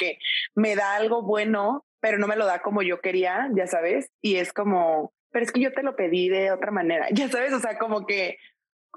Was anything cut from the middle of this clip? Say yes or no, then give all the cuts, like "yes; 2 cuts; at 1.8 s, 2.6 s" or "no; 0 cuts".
yes; 1 cut; at 1.9 s